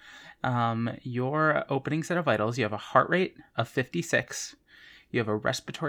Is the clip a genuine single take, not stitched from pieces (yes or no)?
yes